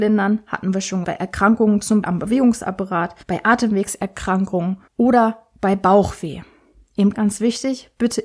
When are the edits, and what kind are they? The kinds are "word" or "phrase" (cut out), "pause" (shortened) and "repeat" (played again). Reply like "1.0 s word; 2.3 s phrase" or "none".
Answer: 1.0 s word; 2.0 s word; 3.2 s pause; 4.9 s pause; 7.1 s word